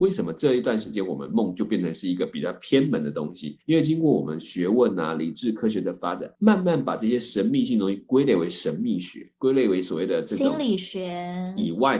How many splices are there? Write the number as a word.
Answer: three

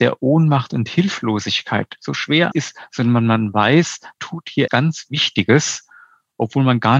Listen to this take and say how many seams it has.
three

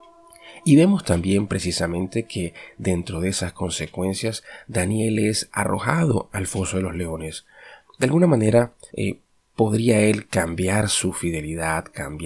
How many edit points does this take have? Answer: one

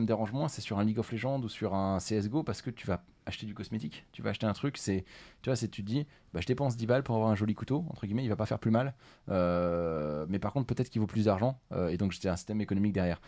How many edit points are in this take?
zero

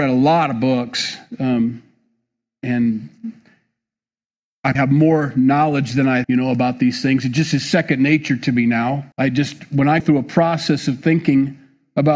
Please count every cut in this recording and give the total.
four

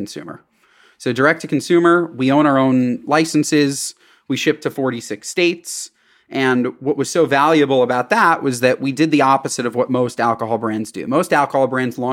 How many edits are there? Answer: zero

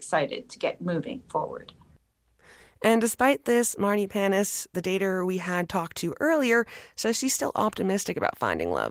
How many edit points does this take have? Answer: zero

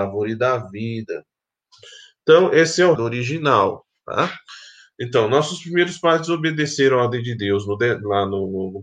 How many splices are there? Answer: one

